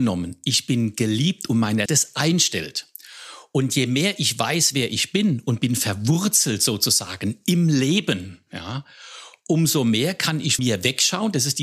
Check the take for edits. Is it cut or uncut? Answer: cut